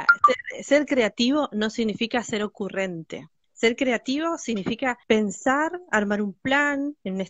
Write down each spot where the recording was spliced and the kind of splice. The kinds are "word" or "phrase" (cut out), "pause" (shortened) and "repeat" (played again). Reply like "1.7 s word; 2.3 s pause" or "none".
3.4 s pause; 5.0 s pause